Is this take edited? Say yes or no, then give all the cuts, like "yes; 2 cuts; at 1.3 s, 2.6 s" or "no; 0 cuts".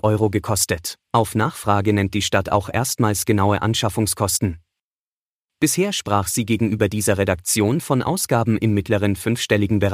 yes; 1 cut; at 1.0 s